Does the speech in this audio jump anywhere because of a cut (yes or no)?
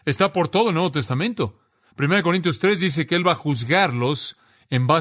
no